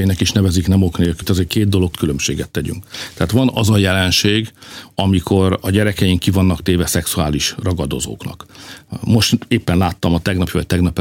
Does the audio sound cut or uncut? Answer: cut